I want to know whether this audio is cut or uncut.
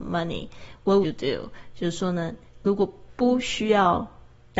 cut